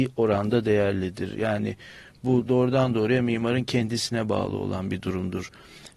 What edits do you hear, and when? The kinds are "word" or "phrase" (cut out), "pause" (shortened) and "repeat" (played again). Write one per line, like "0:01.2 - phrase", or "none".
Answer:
none